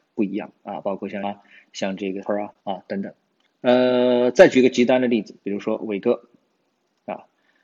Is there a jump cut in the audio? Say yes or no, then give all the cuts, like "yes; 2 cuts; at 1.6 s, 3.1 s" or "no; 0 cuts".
yes; 4 cuts; at 1.2 s, 2.2 s, 2.6 s, 3.5 s